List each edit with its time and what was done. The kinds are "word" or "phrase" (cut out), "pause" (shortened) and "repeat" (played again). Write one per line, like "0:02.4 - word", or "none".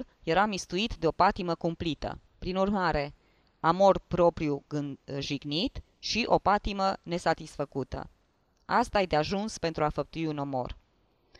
0:02.3 - pause